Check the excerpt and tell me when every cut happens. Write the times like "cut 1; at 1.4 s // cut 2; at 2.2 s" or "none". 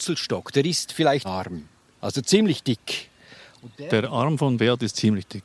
cut 1; at 1.2 s